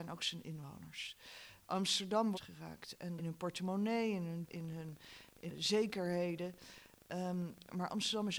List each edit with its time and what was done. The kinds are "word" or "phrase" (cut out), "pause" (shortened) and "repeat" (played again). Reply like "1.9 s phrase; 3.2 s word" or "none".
2.3 s phrase; 3.2 s phrase; 4.5 s word; 5.5 s word